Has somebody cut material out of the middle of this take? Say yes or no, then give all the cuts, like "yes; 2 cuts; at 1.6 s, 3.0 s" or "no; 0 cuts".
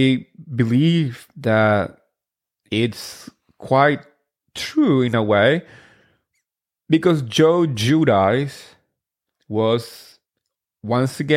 no; 0 cuts